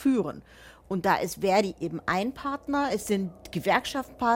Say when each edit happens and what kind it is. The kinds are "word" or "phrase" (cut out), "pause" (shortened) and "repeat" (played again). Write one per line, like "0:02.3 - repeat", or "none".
none